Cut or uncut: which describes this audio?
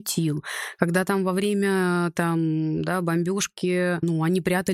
uncut